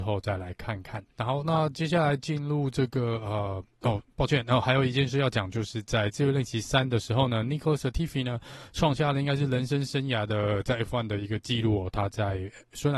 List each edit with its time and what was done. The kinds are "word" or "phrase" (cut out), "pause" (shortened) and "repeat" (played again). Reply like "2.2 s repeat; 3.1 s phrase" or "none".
1.1 s pause